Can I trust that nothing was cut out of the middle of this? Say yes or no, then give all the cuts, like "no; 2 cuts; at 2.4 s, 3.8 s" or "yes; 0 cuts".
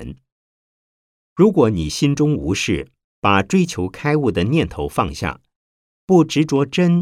yes; 0 cuts